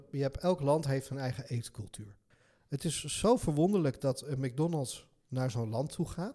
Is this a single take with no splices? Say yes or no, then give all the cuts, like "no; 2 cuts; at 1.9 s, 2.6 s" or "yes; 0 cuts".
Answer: yes; 0 cuts